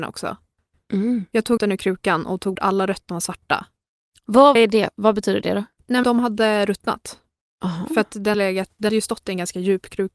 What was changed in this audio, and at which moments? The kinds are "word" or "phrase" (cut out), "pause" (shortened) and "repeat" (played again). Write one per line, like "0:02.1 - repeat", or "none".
0:01.6 - word
0:02.6 - word
0:03.1 - word
0:04.6 - word
0:06.0 - word
0:08.3 - word
0:08.9 - word